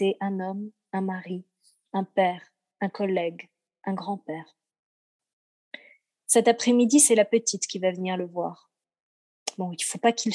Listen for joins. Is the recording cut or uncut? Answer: uncut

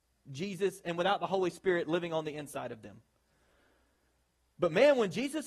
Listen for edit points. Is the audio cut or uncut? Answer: uncut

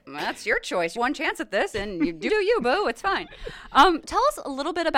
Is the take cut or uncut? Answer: cut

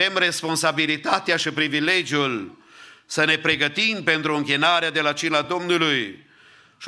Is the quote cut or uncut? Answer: uncut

